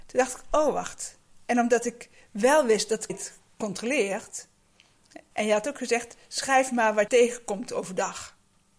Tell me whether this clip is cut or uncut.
cut